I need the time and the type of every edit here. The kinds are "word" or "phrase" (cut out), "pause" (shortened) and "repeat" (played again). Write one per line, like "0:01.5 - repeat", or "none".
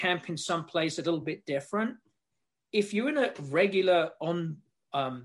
none